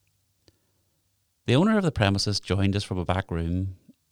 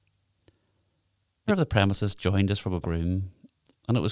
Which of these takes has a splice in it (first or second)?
second